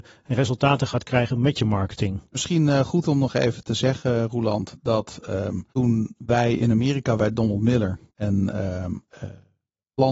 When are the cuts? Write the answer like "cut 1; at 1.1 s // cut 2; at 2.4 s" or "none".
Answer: cut 1; at 5.7 s // cut 2; at 7.2 s // cut 3; at 8.1 s